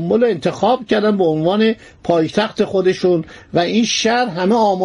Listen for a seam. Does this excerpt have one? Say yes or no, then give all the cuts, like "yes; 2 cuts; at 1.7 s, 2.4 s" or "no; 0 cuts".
no; 0 cuts